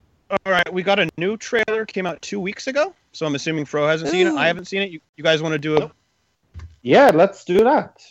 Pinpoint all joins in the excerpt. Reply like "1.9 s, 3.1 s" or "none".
none